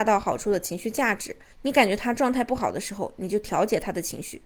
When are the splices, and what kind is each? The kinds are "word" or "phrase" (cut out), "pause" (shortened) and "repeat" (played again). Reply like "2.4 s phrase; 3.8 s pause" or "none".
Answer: 1.5 s pause